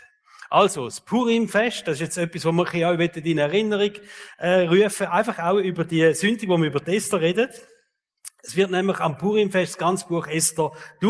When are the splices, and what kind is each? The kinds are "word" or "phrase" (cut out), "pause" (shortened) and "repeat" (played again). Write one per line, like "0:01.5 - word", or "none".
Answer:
none